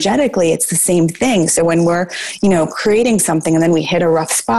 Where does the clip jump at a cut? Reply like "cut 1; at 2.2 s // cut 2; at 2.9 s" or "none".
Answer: none